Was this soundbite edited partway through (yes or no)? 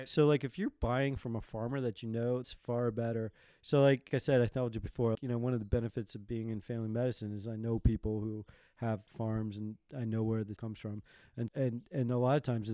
yes